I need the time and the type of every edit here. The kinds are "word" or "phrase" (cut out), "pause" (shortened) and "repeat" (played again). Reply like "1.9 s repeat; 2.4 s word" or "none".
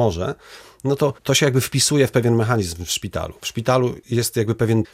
4.0 s pause